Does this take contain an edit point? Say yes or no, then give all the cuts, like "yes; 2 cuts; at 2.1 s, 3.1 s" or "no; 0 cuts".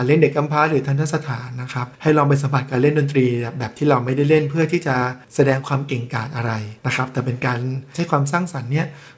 yes; 3 cuts; at 1.9 s, 5.2 s, 6.8 s